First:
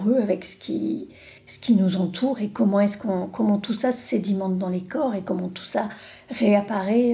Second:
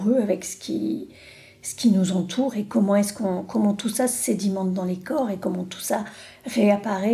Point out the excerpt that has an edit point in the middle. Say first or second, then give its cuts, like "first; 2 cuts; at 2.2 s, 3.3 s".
first; 1 cut; at 1.4 s